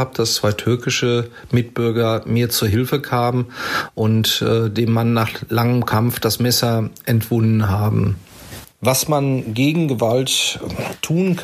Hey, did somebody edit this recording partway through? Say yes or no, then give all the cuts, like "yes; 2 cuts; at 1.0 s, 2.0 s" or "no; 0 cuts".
no; 0 cuts